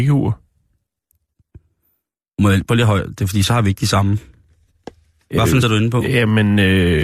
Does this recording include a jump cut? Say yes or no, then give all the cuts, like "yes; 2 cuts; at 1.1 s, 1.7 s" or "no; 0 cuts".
yes; 1 cut; at 5.6 s